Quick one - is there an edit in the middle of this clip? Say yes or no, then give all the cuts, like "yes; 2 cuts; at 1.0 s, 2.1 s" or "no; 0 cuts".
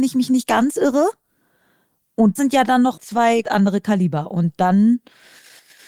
yes; 3 cuts; at 2.4 s, 3.0 s, 3.4 s